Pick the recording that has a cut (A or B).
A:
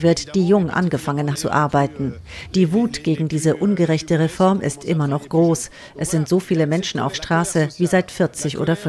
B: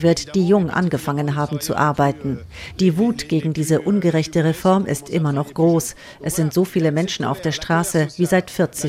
A